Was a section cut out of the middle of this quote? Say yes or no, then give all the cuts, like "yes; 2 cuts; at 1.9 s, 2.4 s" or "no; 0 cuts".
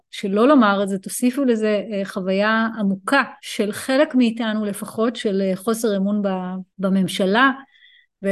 yes; 2 cuts; at 3.4 s, 6.7 s